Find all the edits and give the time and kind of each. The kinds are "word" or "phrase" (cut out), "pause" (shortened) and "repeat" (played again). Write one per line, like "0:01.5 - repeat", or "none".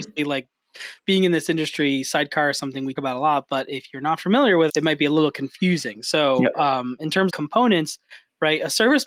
0:03.0 - word
0:04.7 - word
0:07.3 - word